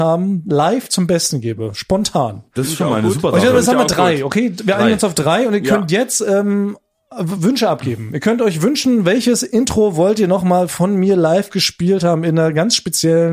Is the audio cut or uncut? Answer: uncut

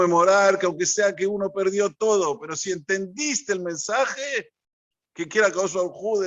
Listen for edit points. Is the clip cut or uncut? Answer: uncut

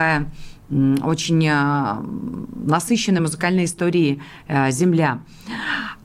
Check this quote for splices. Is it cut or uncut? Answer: uncut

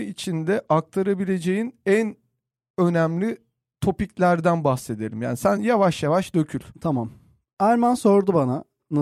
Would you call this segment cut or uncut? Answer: uncut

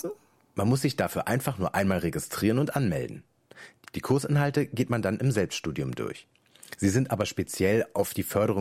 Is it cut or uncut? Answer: uncut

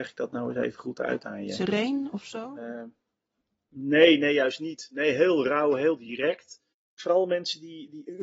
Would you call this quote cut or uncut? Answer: uncut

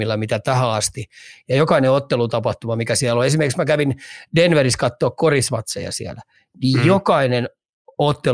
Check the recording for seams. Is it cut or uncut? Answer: uncut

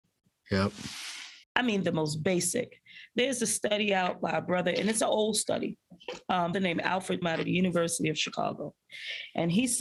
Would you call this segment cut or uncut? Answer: cut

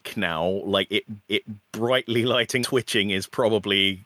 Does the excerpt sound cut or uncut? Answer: cut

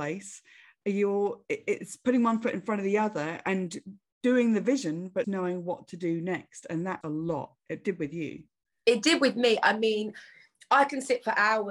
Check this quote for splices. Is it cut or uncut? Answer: cut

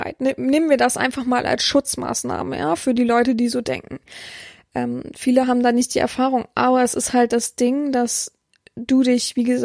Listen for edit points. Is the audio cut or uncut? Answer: uncut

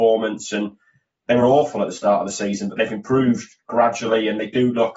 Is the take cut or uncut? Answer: uncut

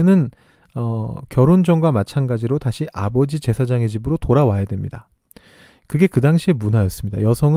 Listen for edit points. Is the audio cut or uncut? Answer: uncut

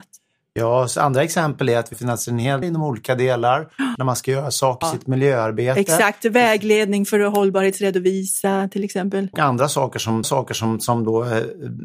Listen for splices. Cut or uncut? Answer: cut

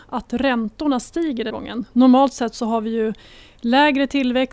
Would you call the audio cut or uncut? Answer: cut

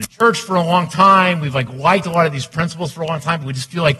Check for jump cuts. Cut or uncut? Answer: uncut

